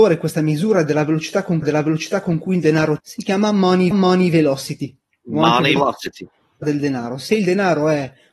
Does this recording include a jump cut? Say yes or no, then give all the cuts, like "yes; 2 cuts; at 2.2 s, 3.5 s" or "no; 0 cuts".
yes; 5 cuts; at 1.6 s, 3.0 s, 3.9 s, 5.8 s, 6.6 s